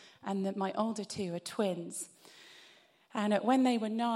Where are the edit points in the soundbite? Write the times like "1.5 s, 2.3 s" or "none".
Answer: none